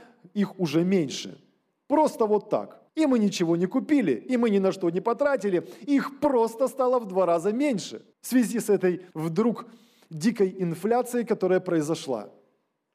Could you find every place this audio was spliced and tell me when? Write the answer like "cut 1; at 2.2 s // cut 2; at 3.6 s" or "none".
cut 1; at 1.7 s // cut 2; at 2.9 s // cut 3; at 8.1 s // cut 4; at 9.1 s